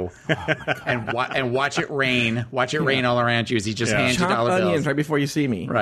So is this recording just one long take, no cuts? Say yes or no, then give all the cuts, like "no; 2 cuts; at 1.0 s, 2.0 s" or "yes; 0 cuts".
yes; 0 cuts